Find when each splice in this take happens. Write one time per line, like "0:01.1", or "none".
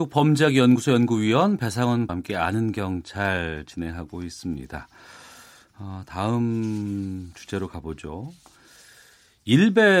0:02.1